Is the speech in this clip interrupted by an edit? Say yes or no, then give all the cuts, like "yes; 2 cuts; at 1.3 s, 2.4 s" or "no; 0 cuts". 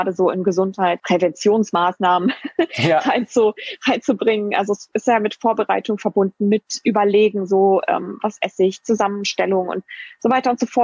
yes; 1 cut; at 1.0 s